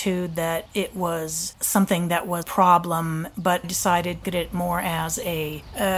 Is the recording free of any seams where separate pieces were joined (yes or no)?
no